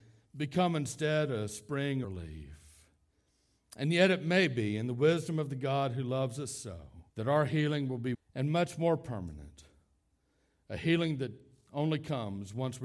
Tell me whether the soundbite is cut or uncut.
cut